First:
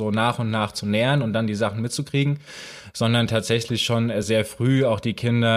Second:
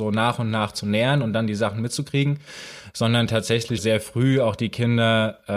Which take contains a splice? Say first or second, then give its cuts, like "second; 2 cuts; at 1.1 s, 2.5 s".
second; 1 cut; at 3.8 s